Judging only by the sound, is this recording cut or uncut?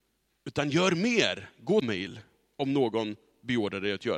cut